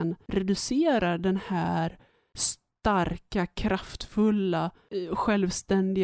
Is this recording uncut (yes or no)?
yes